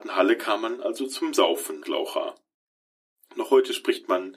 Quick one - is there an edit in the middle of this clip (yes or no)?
yes